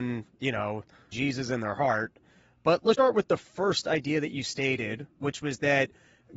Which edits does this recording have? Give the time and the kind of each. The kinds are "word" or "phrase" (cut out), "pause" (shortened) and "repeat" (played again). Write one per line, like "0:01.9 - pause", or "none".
0:01.1 - word
0:02.9 - word